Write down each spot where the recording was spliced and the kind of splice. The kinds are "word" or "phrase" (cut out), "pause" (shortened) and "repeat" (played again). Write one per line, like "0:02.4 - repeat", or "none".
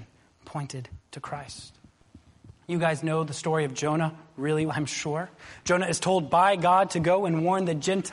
0:01.0 - pause
0:02.6 - pause
0:04.7 - word